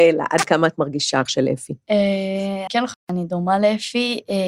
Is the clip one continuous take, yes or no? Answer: no